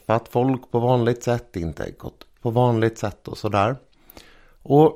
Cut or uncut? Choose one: cut